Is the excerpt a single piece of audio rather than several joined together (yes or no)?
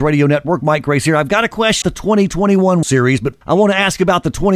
no